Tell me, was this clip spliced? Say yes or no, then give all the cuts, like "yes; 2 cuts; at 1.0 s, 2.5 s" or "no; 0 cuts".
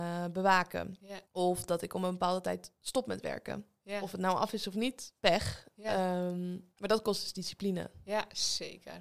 yes; 3 cuts; at 1.2 s, 5.2 s, 6.7 s